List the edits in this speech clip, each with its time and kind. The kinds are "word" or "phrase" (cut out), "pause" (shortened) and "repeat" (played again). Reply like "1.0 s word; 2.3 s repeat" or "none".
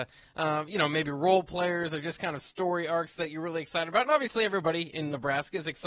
none